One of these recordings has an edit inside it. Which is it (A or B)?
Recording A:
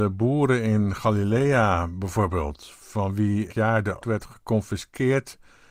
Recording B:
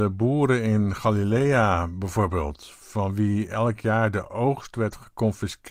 A